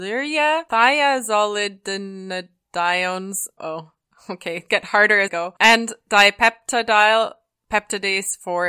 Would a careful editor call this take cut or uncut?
cut